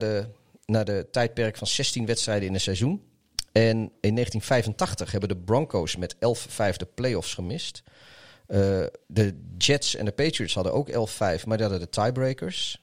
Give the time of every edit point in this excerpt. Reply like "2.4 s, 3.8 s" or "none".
9.0 s